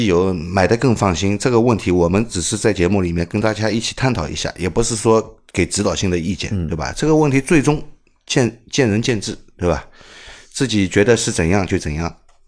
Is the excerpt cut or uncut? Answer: uncut